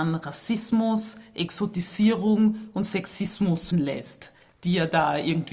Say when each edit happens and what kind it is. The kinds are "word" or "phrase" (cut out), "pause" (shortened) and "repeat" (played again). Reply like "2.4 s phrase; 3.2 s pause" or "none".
3.7 s word